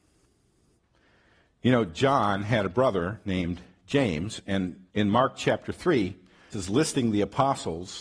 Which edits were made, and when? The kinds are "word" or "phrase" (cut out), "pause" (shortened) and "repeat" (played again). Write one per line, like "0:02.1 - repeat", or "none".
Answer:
0:04.9 - pause
0:06.5 - word